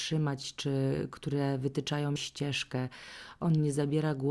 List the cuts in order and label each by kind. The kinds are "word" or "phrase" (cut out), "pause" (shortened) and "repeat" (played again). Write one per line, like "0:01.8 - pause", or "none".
0:02.2 - word